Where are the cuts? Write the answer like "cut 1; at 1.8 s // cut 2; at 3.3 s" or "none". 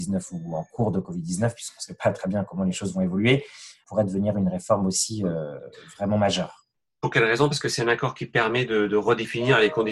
cut 1; at 8.9 s